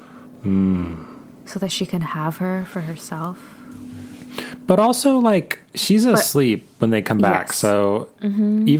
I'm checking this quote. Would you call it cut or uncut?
uncut